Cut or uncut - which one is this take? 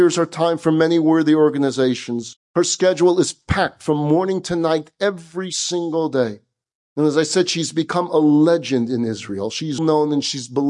cut